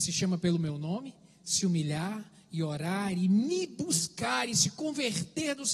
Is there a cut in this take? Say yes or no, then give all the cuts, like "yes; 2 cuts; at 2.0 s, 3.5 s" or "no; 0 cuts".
no; 0 cuts